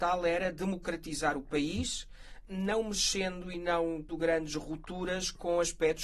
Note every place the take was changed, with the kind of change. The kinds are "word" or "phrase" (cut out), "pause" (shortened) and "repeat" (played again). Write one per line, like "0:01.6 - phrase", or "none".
0:04.1 - word